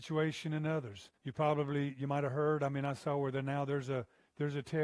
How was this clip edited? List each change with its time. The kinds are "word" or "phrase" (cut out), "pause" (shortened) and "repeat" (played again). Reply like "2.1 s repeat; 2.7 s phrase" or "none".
1.1 s pause